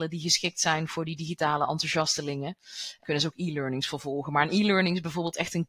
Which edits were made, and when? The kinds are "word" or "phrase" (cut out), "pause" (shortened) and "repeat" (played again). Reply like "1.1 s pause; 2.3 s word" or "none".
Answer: 3.0 s word